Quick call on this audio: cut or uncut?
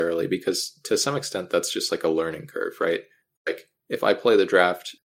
uncut